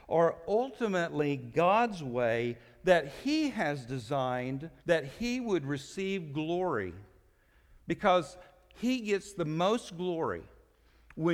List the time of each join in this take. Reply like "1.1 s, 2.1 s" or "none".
4.8 s